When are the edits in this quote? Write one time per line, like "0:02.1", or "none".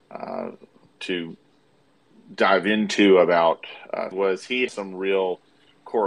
0:04.1
0:04.7